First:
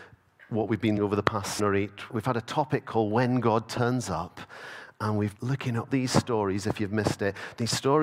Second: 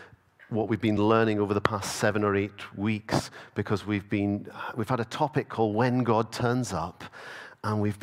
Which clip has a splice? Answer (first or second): first